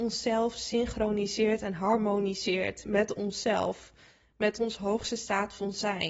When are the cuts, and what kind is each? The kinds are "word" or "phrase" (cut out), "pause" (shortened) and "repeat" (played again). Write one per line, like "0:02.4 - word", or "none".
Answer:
none